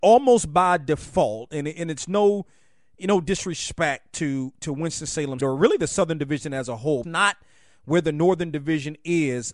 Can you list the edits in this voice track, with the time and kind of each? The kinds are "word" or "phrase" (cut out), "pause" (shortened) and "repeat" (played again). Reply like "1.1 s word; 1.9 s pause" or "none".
5.4 s word; 7.0 s phrase